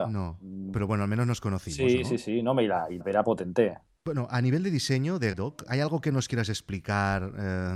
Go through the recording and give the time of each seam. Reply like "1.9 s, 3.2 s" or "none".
3.0 s, 5.3 s